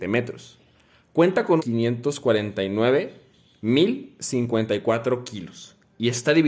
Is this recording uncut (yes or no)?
no